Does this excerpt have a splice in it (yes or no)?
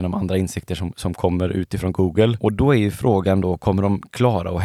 no